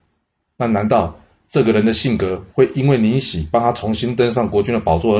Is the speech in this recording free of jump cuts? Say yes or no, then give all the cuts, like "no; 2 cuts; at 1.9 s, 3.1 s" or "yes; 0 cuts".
yes; 0 cuts